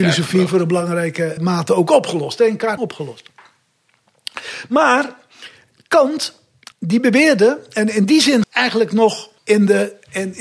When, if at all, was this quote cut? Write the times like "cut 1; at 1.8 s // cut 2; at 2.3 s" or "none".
cut 1; at 1.4 s // cut 2; at 2.8 s // cut 3; at 6.7 s // cut 4; at 8.4 s // cut 5; at 9.4 s